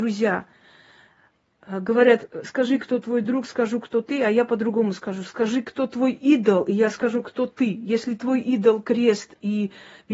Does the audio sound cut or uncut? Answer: uncut